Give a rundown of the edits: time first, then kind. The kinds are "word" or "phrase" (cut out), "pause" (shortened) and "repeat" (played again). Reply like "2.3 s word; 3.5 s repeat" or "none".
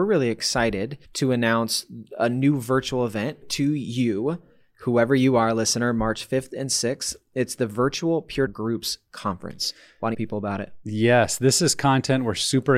1.0 s pause; 3.4 s word; 8.5 s word; 10.1 s phrase

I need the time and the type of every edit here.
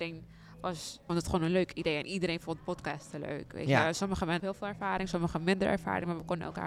1.1 s word; 4.4 s word

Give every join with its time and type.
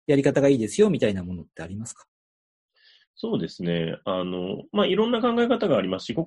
none

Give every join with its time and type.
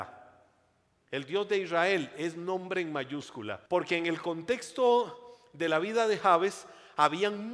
3.7 s pause

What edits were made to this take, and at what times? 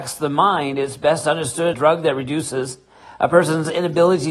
1.7 s phrase

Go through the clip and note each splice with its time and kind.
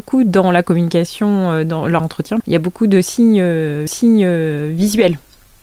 2.0 s word; 2.4 s word; 3.9 s repeat

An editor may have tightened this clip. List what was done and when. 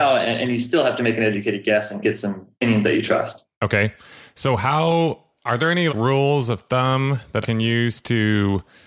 2.0 s word; 2.5 s pause; 3.5 s pause; 5.9 s word; 7.4 s word

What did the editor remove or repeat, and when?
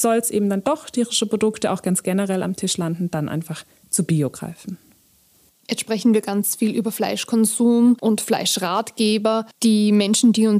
none

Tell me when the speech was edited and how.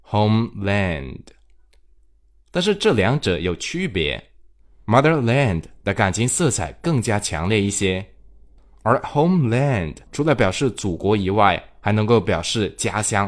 10.1 s pause

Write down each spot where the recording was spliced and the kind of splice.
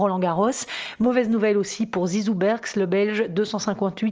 none

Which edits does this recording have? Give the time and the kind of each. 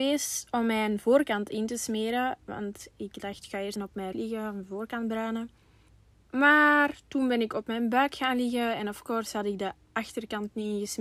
3.8 s word; 4.1 s word; 5.9 s pause

